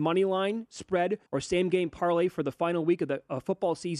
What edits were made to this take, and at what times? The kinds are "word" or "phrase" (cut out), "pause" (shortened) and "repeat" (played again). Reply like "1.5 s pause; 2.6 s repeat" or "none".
1.3 s pause